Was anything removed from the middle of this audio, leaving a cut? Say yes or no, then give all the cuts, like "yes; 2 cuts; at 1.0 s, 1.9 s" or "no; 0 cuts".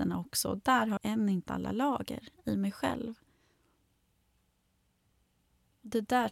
yes; 2 cuts; at 1.0 s, 1.4 s